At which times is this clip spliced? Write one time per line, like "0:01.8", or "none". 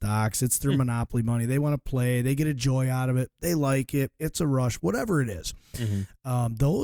none